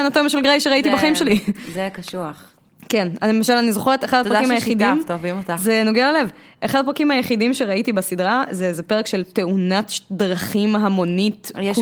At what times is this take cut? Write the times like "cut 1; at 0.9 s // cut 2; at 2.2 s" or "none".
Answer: none